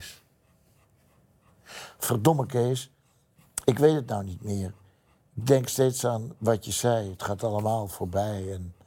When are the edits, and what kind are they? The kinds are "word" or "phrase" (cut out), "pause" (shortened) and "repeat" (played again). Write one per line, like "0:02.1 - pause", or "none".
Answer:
none